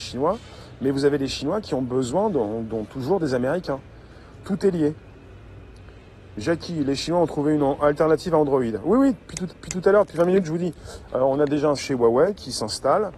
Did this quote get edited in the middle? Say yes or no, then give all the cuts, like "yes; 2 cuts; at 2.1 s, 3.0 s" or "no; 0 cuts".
yes; 2 cuts; at 9.5 s, 11.8 s